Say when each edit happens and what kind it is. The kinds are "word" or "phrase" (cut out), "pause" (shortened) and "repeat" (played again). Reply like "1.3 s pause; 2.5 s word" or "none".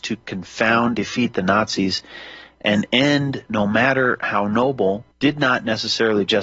0.9 s word; 3.5 s word; 5.1 s pause